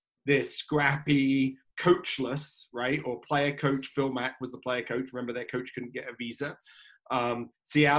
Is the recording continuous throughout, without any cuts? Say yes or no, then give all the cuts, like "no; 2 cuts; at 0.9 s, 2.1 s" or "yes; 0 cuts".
yes; 0 cuts